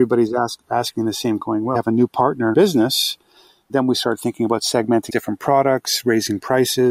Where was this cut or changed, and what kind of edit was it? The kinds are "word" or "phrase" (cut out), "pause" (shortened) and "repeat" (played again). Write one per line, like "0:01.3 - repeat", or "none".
0:01.4 - word
0:01.7 - word
0:02.5 - word
0:03.7 - word
0:05.1 - word